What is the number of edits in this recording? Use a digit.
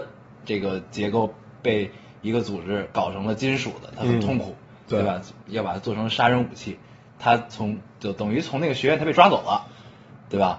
0